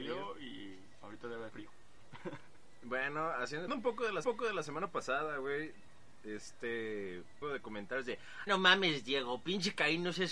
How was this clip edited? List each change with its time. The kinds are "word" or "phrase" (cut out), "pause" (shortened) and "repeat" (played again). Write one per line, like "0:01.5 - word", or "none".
0:01.5 - word
0:03.7 - word
0:04.2 - repeat
0:07.4 - phrase
0:08.5 - word